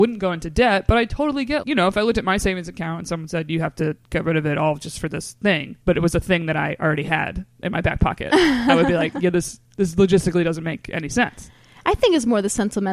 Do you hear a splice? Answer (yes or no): yes